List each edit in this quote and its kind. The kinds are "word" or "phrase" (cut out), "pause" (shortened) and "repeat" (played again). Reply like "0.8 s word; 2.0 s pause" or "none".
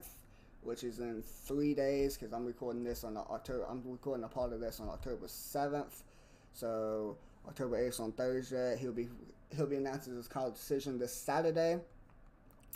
none